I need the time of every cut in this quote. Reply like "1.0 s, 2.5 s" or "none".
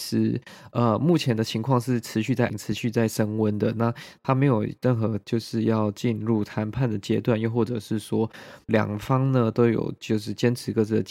2.5 s, 8.7 s